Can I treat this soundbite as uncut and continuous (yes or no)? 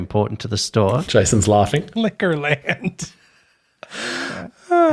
yes